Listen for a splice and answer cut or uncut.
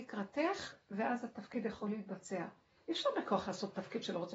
uncut